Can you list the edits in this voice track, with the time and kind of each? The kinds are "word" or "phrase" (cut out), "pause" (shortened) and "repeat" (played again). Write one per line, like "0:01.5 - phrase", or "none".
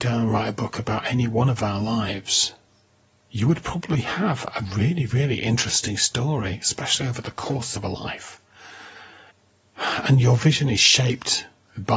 none